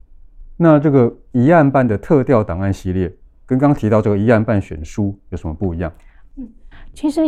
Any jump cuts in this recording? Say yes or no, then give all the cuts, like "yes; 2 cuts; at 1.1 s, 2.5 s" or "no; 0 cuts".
no; 0 cuts